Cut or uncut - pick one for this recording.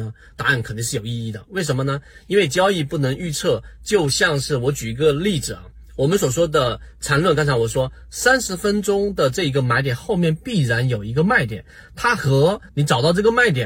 cut